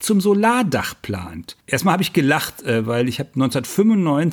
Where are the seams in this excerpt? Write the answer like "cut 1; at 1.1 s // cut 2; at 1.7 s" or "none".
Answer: cut 1; at 1.6 s